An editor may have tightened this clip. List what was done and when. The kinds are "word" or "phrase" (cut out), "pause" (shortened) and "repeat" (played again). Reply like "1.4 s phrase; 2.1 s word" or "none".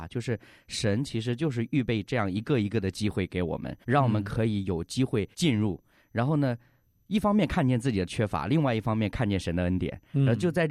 3.8 s pause; 5.3 s pause